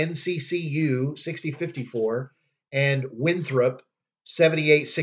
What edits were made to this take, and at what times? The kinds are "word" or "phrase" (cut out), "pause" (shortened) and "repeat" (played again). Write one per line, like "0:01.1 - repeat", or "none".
0:01.5 - word

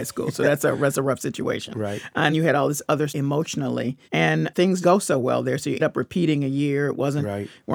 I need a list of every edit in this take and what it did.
0:02.3 - word
0:03.1 - phrase
0:04.0 - pause
0:04.8 - word
0:05.8 - word

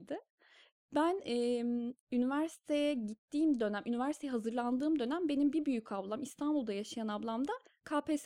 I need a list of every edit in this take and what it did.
0:02.0 - pause

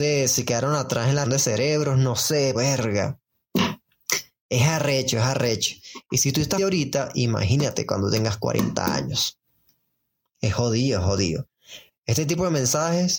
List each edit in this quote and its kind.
0:01.2 - word
0:02.5 - word
0:06.6 - word

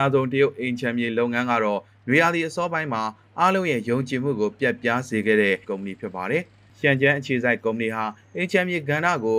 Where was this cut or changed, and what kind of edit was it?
0:05.6 - word

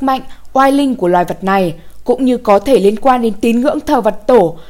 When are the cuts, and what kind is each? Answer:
none

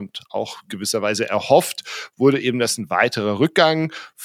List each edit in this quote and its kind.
none

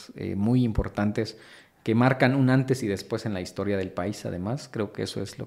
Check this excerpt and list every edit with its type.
none

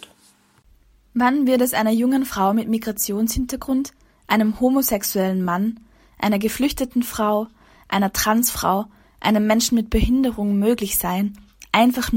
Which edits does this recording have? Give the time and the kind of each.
none

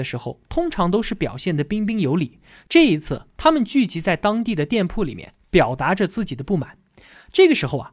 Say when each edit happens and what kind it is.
none

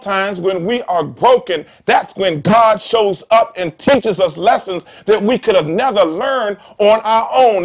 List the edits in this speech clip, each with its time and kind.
none

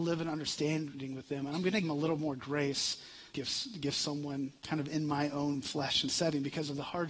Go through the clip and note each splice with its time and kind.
0:01.8 - phrase
0:03.3 - phrase
0:04.6 - pause

